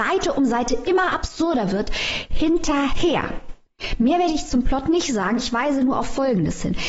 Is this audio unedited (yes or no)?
yes